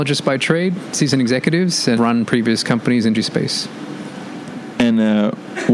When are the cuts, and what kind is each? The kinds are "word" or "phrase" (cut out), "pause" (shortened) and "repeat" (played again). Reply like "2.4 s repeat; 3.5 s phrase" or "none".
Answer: 2.0 s word; 3.1 s word